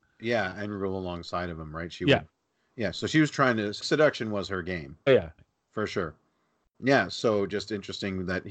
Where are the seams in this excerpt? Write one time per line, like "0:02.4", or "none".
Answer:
0:03.8
0:05.1
0:05.4
0:06.7